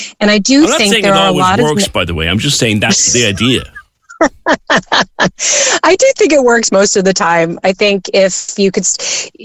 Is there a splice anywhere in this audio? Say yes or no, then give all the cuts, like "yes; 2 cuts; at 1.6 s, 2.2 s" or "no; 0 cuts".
no; 0 cuts